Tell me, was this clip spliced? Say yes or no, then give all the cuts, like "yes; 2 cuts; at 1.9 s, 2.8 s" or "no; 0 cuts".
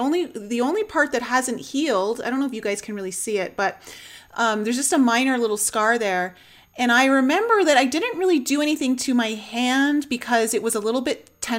no; 0 cuts